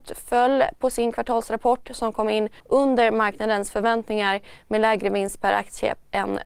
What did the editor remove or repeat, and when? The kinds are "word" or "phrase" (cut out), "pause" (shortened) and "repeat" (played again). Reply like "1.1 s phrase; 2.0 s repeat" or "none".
2.6 s pause